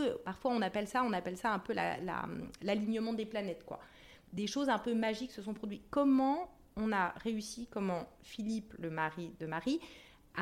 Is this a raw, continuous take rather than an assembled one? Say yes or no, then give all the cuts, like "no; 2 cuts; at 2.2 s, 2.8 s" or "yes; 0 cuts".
yes; 0 cuts